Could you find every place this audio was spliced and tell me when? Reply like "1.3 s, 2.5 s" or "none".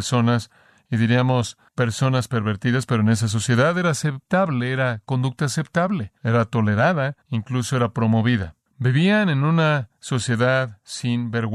1.7 s, 6.2 s, 7.2 s, 8.7 s